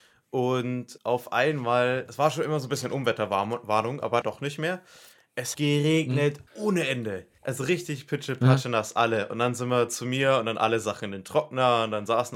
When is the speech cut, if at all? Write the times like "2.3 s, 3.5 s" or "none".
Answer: 1.0 s, 4.2 s, 5.5 s, 6.5 s, 7.4 s

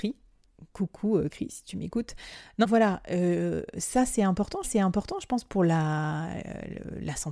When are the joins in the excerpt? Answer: 1.3 s, 2.6 s, 4.6 s

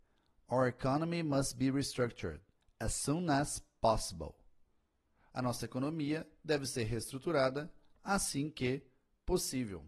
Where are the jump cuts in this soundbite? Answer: none

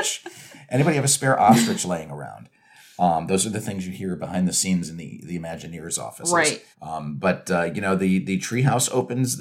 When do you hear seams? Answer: 6.7 s

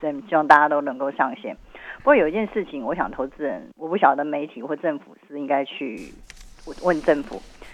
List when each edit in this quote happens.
3.7 s

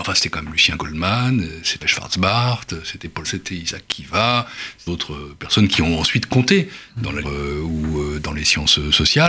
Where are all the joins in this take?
1.8 s, 3.2 s, 4.9 s, 7.2 s

